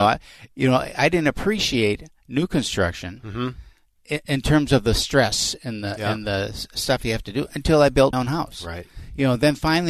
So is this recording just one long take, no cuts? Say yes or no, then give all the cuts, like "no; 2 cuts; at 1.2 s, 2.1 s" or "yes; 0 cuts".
no; 1 cut; at 8.1 s